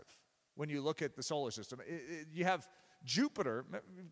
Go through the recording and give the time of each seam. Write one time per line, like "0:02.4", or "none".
none